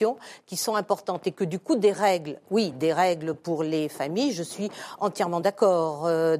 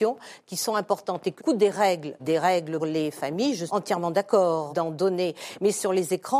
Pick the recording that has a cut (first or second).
second